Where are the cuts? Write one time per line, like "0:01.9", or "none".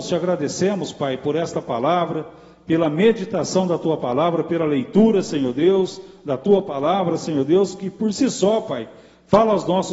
none